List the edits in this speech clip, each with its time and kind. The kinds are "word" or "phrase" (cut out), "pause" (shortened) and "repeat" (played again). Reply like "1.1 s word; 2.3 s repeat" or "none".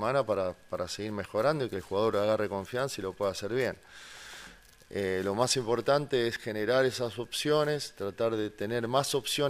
none